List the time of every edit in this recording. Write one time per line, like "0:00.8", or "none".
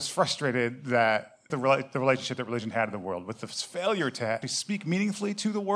0:01.5
0:04.4